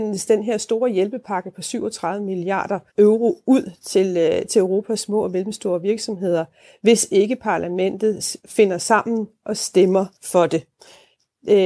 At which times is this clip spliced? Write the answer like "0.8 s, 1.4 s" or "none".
2.9 s, 10.2 s

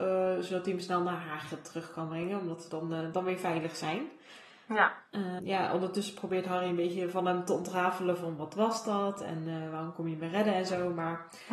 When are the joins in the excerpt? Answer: 5.4 s

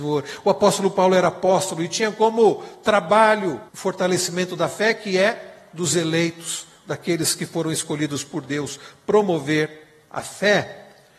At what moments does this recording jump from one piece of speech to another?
3.7 s

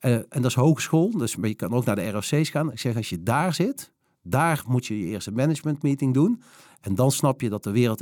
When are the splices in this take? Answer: none

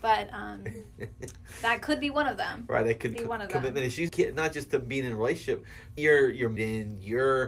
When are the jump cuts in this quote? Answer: 3.1 s, 4.1 s, 6.0 s, 6.6 s

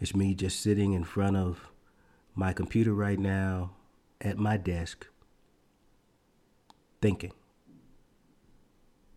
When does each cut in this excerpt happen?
none

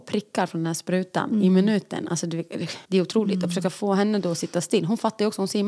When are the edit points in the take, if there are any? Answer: none

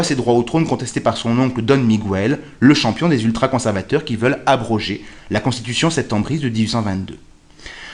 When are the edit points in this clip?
none

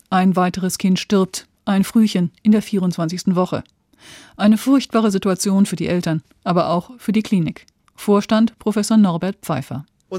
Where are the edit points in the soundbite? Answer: none

